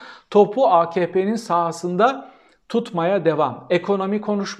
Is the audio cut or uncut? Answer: uncut